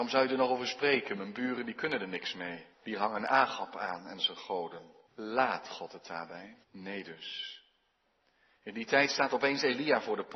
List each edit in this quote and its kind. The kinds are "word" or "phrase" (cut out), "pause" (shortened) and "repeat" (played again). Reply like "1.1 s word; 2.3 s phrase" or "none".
2.7 s pause; 5.1 s pause; 6.6 s pause